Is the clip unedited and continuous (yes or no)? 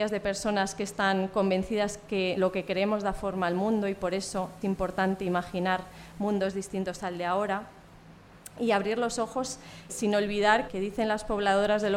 no